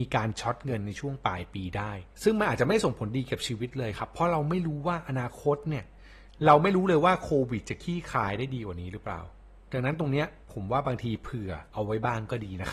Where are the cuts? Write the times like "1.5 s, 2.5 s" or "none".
2.1 s, 9.6 s, 10.4 s, 11.7 s